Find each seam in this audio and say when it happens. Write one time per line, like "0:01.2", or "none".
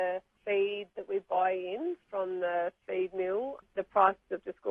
none